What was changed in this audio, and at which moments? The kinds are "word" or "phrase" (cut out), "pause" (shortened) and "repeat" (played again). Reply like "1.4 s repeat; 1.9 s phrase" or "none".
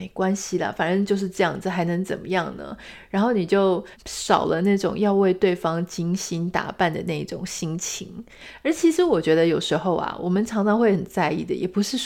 3.9 s pause